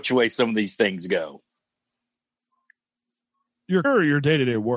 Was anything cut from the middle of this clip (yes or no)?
yes